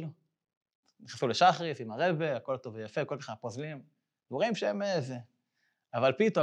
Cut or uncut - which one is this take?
uncut